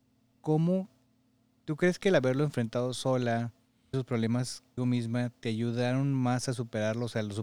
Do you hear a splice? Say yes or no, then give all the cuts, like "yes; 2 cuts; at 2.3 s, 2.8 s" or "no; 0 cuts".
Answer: yes; 2 cuts; at 3.9 s, 4.8 s